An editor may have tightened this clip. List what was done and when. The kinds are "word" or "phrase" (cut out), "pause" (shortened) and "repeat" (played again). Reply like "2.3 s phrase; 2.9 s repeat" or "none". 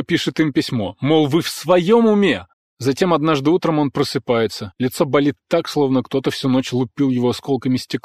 2.5 s pause